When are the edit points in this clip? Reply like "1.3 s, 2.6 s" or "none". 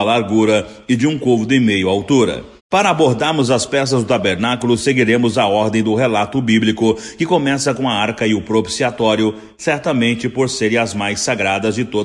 2.6 s